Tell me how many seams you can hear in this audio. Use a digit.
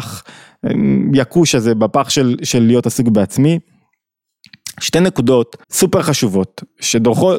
1